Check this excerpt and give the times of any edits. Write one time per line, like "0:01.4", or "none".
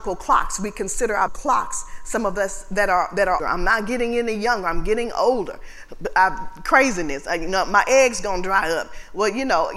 0:01.3
0:03.4